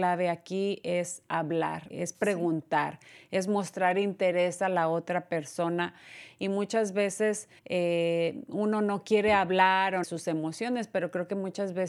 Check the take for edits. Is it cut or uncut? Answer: cut